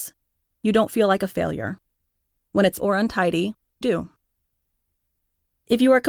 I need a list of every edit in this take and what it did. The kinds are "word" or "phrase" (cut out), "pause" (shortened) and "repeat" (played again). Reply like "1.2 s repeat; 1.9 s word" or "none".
2.8 s word; 3.8 s word